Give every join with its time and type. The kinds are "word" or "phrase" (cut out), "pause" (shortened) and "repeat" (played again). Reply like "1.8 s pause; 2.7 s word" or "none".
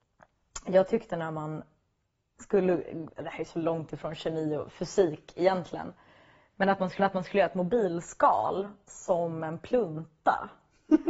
7.0 s repeat